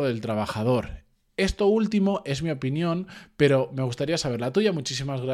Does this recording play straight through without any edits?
yes; 0 cuts

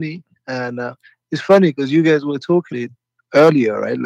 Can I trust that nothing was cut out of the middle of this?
no; 1 cut; at 2.7 s

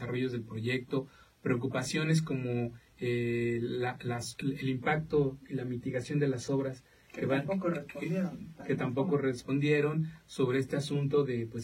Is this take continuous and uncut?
yes; 0 cuts

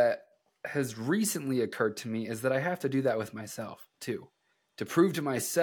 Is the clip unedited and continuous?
yes; 0 cuts

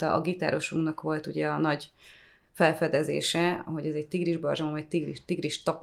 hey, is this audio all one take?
yes; 0 cuts

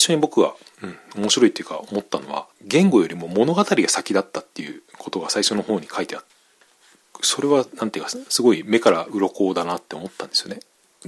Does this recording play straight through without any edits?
no; 1 cut; at 2.5 s

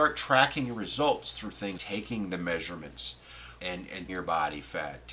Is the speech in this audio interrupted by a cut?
yes; 3 cuts; at 1.8 s, 3.6 s, 4.1 s

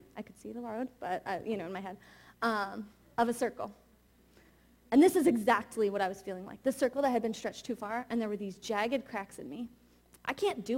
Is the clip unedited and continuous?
yes; 0 cuts

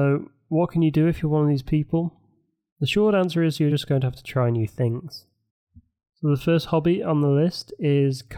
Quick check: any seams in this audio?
no; 0 cuts

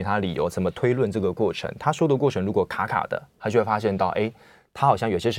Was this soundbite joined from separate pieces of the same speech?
no; 0 cuts

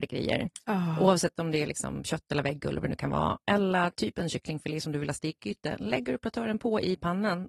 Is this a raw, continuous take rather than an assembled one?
yes; 0 cuts

